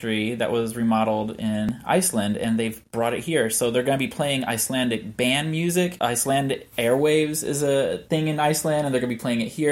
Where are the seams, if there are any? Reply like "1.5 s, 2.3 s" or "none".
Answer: none